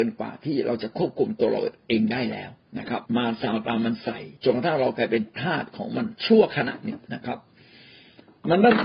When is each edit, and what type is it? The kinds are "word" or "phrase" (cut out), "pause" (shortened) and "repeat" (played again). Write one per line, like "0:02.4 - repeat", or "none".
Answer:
0:02.6 - pause
0:03.1 - pause
0:04.4 - pause
0:06.2 - pause
0:07.0 - pause